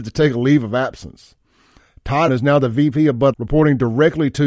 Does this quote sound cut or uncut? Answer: cut